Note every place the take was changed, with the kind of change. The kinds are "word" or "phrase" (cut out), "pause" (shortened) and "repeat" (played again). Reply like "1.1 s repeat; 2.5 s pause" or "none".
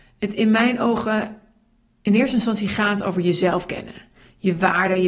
none